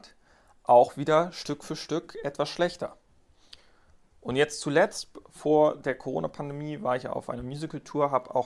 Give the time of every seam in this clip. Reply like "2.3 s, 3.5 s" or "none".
none